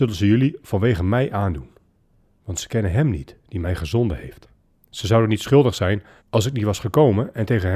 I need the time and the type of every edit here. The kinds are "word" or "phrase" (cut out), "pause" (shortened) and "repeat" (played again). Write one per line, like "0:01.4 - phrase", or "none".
0:01.9 - pause
0:04.7 - pause
0:06.2 - pause